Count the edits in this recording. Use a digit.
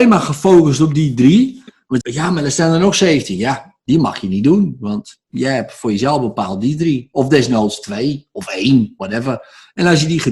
1